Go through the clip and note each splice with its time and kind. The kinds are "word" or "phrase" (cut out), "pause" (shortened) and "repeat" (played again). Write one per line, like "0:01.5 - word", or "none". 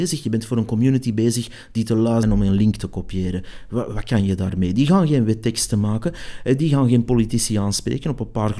0:02.2 - word

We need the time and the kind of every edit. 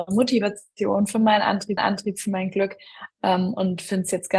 0:01.8 - repeat

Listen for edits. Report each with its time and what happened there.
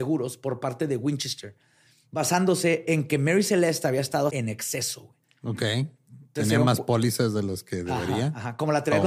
0:04.3 - word
0:05.2 - pause

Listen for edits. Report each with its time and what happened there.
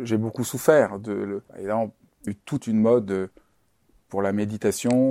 0:01.5 - pause
0:02.3 - word
0:02.6 - phrase

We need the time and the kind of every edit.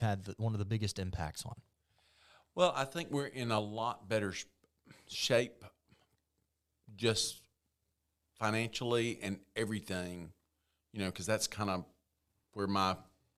none

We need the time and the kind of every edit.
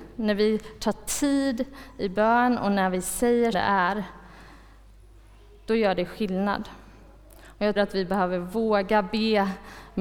0:03.5 - word
0:07.8 - word

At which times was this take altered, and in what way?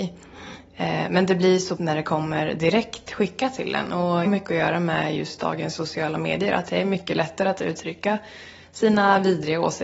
0:01.8 - phrase
0:04.3 - phrase

